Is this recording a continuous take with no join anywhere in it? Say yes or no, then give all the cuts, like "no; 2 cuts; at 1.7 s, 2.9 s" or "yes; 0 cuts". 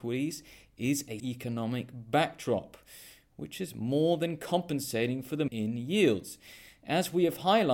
no; 2 cuts; at 1.2 s, 5.5 s